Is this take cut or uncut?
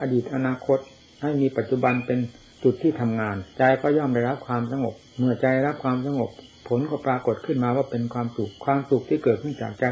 cut